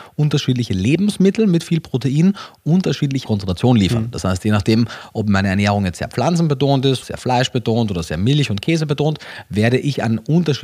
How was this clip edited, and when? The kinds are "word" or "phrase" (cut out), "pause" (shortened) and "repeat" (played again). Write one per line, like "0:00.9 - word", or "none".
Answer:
0:03.2 - phrase
0:07.0 - word